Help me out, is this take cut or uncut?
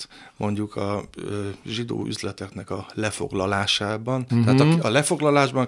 uncut